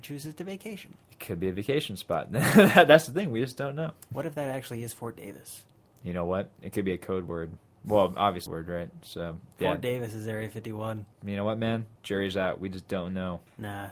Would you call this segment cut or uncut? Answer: cut